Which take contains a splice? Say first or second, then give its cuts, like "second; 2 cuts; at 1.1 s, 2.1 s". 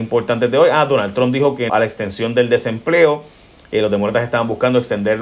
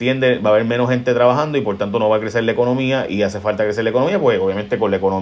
first; 1 cut; at 1.7 s